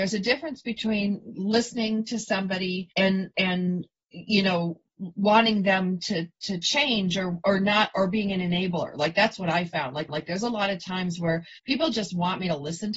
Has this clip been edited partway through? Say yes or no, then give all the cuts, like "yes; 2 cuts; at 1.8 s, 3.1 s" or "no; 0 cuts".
yes; 3 cuts; at 2.9 s, 10.1 s, 11.6 s